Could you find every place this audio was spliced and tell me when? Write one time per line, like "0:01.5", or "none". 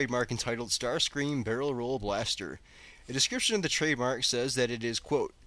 none